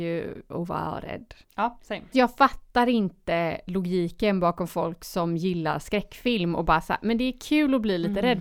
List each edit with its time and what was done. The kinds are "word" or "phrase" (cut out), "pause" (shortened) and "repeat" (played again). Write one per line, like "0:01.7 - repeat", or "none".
0:01.4 - pause
0:02.1 - word

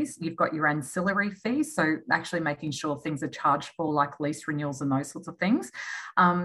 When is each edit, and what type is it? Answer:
none

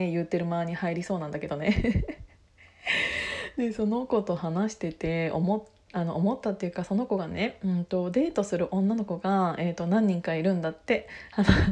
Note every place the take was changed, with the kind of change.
none

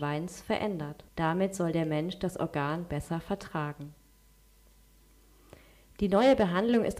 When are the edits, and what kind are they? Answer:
0:01.1 - pause

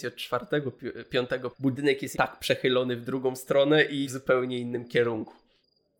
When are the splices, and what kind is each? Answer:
0:01.5 - word
0:02.1 - word
0:04.0 - word

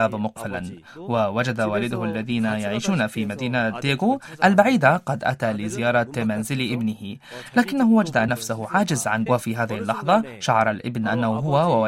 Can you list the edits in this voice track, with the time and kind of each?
0:08.3 - word
0:09.3 - phrase

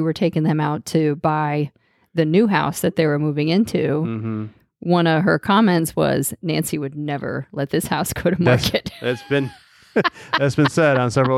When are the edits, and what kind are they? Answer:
none

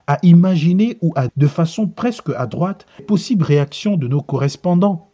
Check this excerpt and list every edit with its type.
0:01.3 - word
0:03.0 - word

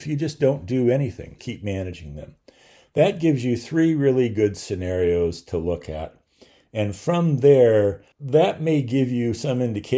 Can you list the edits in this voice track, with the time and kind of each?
0:01.4 - phrase
0:08.1 - pause

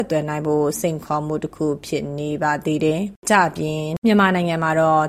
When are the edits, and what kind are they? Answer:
0:03.2 - pause

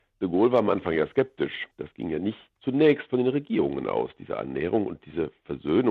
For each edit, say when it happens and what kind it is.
0:01.7 - pause

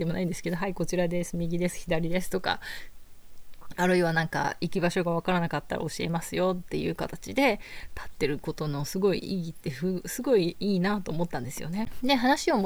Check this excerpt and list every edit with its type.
none

